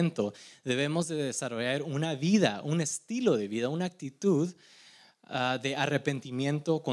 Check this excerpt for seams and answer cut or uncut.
uncut